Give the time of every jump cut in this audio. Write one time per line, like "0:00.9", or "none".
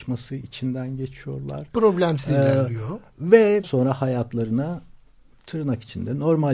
0:03.6